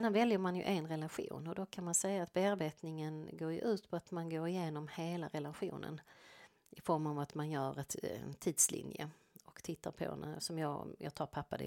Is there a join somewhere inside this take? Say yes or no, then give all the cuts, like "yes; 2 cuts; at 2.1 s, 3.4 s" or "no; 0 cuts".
no; 0 cuts